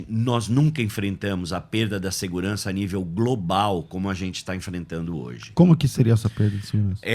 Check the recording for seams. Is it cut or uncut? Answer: uncut